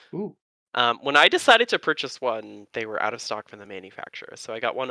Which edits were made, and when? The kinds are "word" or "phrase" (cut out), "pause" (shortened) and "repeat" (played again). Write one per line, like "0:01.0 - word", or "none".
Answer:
none